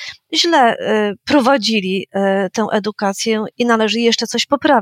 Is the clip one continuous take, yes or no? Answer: no